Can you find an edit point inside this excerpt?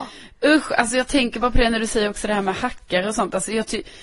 no; 0 cuts

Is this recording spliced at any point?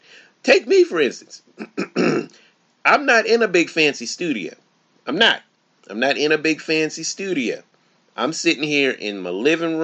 no; 0 cuts

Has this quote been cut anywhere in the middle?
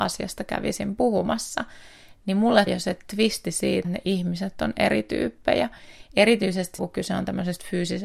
yes; 3 cuts; at 2.7 s, 3.8 s, 6.8 s

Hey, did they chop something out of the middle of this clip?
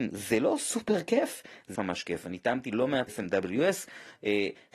yes; 2 cuts; at 1.7 s, 3.1 s

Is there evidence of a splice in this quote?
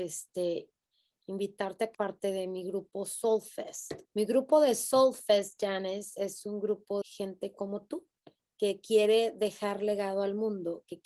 yes; 3 cuts; at 1.9 s, 4.1 s, 7.0 s

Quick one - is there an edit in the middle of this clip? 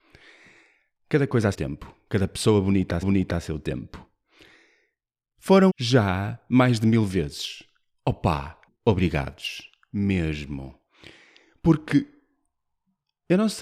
yes; 4 cuts; at 1.5 s, 3.0 s, 5.7 s, 8.7 s

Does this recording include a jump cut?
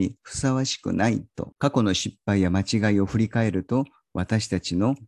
yes; 1 cut; at 1.6 s

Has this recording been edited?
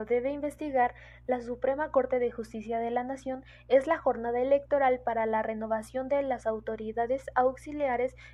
no; 0 cuts

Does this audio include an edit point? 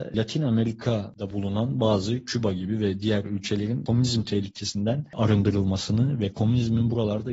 no; 0 cuts

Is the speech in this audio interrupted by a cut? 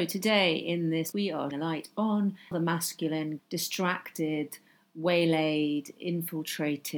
yes; 4 cuts; at 1.1 s, 1.5 s, 2.5 s, 3.4 s

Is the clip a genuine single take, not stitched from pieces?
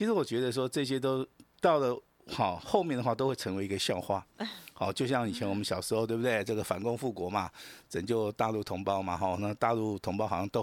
yes; 0 cuts

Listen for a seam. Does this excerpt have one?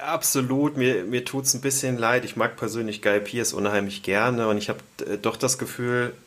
no; 0 cuts

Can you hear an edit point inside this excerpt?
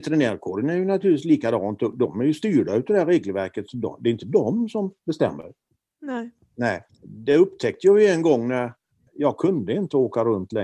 yes; 3 cuts; at 5.8 s, 6.9 s, 8.9 s

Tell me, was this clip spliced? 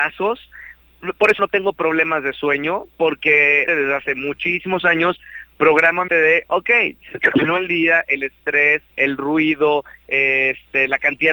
yes; 4 cuts; at 1.4 s, 3.7 s, 6.1 s, 8.9 s

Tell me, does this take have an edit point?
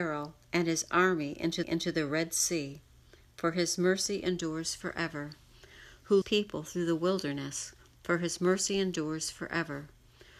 yes; 2 cuts; at 1.6 s, 6.2 s

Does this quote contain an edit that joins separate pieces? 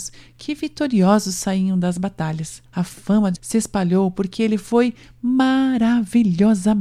yes; 2 cuts; at 2.7 s, 3.4 s

